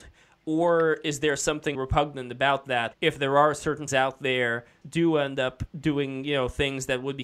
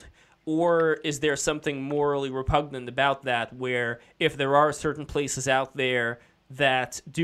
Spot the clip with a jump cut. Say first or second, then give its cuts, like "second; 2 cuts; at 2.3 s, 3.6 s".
first; 4 cuts; at 1.7 s, 2.9 s, 3.9 s, 4.8 s